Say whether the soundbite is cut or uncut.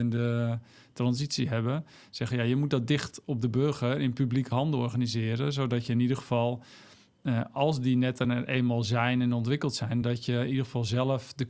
uncut